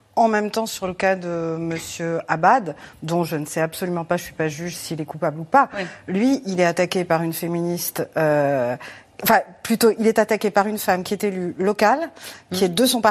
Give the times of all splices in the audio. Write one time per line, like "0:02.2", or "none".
none